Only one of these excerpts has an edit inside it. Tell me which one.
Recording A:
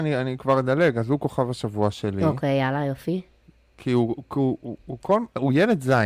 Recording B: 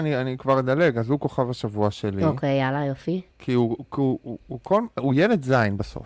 B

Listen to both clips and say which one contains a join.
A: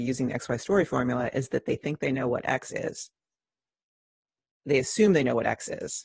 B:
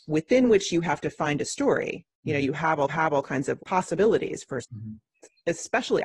B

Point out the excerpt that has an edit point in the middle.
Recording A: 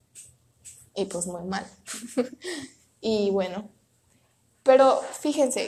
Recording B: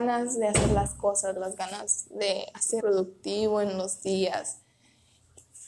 B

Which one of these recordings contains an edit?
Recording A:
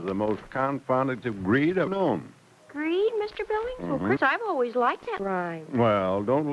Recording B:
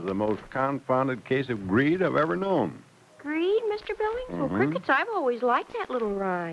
A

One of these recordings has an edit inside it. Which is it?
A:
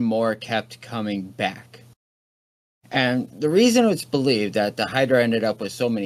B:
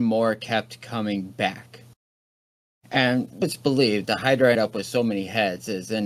B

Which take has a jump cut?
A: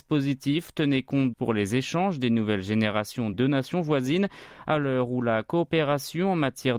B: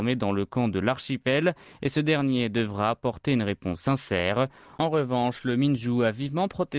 A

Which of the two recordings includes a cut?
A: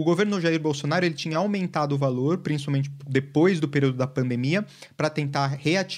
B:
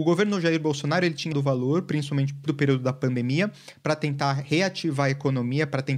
B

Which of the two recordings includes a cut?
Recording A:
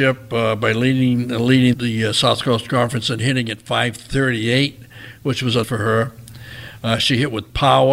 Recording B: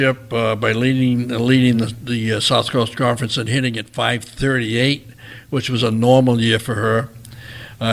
A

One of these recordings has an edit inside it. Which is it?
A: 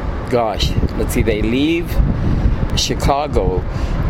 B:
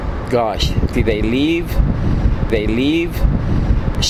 B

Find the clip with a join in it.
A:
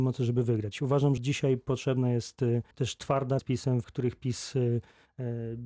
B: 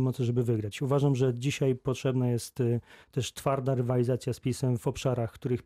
A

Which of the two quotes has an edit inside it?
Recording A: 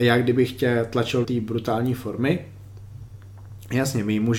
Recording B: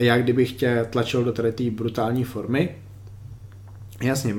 A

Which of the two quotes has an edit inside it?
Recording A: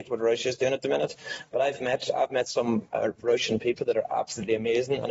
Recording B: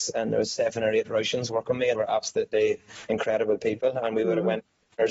B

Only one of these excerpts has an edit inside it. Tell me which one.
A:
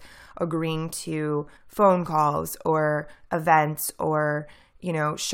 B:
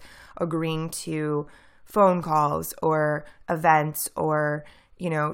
A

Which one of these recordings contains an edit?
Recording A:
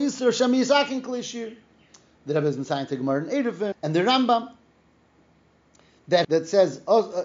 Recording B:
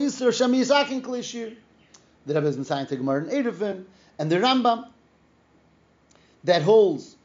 A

